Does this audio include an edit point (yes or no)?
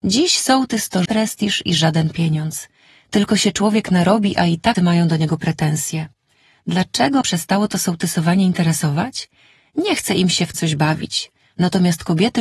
yes